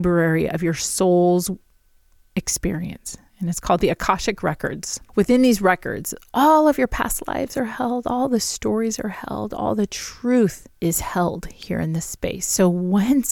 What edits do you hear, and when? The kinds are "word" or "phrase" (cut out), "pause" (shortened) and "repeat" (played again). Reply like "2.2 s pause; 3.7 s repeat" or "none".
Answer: 3.3 s pause; 5.0 s pause; 10.8 s pause